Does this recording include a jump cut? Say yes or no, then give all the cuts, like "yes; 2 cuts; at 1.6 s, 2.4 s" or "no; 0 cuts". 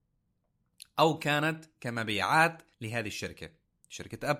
yes; 1 cut; at 2.7 s